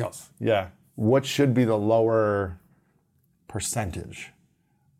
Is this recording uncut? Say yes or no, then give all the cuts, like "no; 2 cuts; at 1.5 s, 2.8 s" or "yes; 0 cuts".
yes; 0 cuts